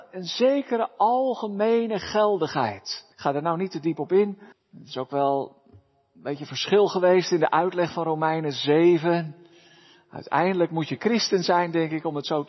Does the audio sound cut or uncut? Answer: cut